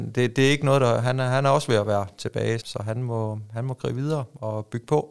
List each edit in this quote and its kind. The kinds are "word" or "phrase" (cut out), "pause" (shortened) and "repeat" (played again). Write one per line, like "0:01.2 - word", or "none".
0:02.6 - word